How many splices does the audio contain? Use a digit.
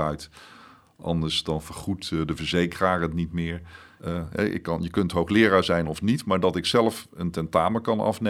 0